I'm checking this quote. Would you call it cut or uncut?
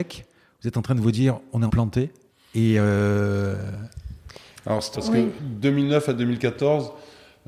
cut